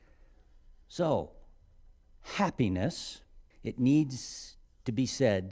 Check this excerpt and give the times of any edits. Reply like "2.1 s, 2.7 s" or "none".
3.5 s